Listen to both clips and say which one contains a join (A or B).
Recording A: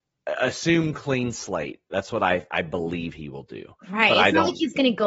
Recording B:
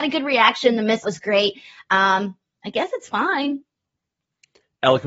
B